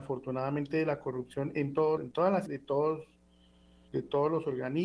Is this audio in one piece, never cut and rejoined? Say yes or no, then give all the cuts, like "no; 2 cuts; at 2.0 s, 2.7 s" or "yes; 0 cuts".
no; 2 cuts; at 2.0 s, 2.5 s